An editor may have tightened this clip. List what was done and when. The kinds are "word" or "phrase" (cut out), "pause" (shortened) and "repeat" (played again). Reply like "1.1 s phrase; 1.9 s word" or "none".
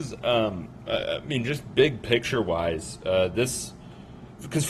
none